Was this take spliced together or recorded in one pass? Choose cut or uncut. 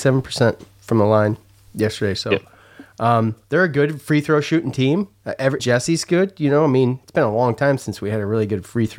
cut